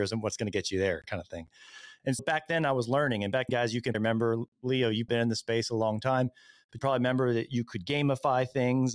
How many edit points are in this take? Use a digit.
5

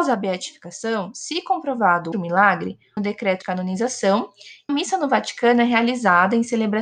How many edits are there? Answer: 4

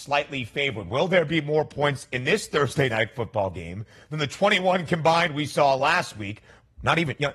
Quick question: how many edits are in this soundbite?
0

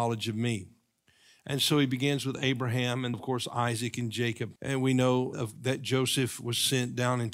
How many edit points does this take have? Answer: 3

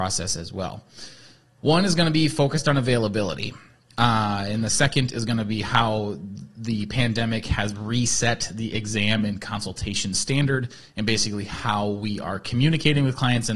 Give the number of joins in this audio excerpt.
0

